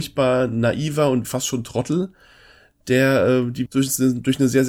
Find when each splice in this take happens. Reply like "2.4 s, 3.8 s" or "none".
1.2 s, 3.7 s